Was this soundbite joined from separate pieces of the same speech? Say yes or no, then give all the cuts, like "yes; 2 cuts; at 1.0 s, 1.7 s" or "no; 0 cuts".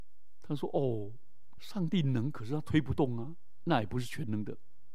yes; 1 cut; at 1.6 s